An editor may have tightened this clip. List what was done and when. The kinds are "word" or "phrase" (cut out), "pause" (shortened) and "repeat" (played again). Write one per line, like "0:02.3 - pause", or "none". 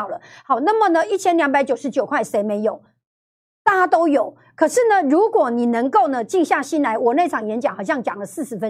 none